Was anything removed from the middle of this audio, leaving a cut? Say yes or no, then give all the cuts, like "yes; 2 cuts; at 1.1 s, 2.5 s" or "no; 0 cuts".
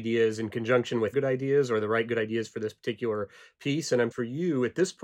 yes; 2 cuts; at 1.1 s, 4.1 s